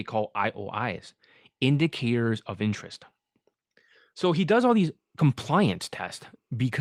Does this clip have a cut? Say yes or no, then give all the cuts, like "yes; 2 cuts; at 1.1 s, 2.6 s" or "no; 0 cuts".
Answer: no; 0 cuts